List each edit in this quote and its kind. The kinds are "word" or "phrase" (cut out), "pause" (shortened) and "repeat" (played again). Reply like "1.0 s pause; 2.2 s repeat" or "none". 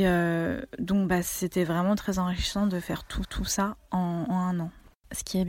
3.2 s repeat